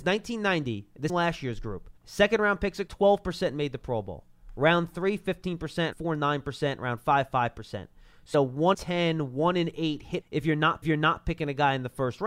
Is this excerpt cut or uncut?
cut